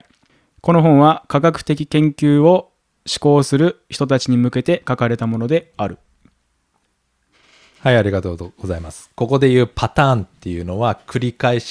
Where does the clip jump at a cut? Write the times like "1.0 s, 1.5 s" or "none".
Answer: none